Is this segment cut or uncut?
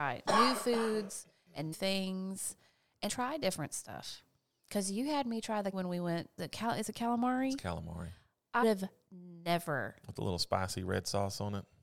cut